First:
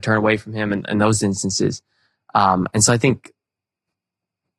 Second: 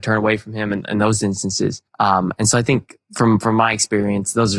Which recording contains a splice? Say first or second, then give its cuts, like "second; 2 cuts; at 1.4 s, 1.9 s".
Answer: second; 2 cuts; at 1.9 s, 3.0 s